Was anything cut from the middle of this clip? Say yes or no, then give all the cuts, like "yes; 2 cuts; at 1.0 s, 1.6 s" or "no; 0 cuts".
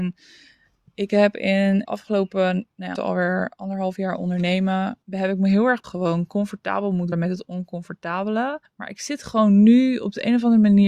yes; 6 cuts; at 1.9 s, 3.0 s, 5.0 s, 5.8 s, 7.1 s, 8.6 s